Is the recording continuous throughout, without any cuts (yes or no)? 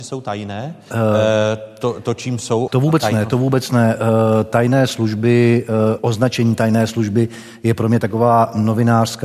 no